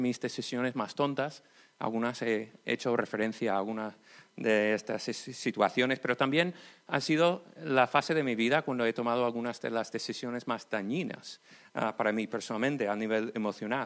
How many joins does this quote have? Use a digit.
0